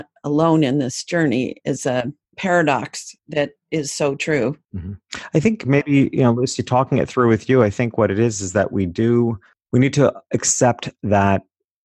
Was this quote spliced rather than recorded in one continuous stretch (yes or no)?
yes